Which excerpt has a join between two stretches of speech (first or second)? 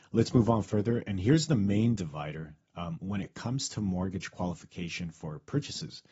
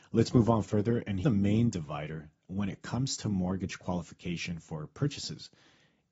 second